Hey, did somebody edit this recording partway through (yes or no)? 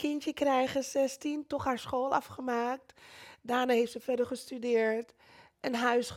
no